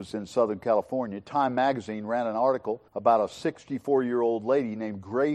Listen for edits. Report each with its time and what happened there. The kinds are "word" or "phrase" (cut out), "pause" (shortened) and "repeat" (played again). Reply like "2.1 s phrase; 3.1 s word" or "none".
2.9 s pause